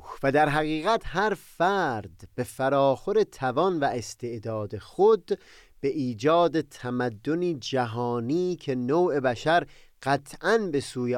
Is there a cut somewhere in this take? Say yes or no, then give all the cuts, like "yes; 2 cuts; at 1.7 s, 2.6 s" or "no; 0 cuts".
no; 0 cuts